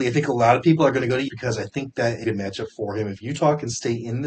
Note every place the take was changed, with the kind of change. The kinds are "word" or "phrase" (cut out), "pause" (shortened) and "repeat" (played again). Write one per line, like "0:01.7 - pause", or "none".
0:01.3 - word
0:02.2 - phrase

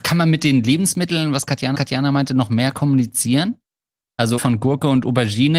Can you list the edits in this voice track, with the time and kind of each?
0:01.7 - repeat
0:04.4 - word

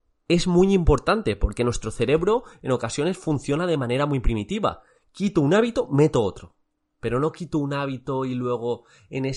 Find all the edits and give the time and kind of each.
none

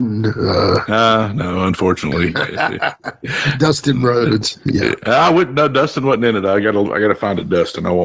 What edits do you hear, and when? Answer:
none

